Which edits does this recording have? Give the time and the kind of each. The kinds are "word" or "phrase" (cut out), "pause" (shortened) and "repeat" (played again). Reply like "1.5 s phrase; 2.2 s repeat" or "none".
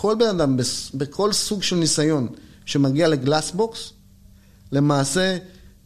none